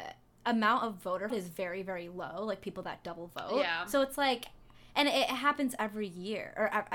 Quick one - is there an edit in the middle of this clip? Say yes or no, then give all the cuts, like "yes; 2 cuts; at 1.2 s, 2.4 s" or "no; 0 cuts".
yes; 1 cut; at 1.3 s